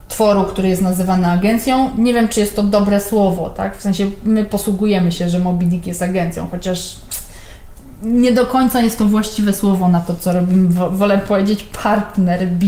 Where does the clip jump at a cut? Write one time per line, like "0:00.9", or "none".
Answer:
none